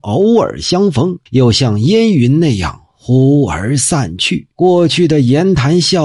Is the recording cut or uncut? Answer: cut